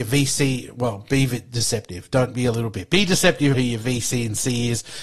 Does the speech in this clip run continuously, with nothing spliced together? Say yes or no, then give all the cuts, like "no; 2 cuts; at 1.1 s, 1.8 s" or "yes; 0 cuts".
no; 1 cut; at 3.5 s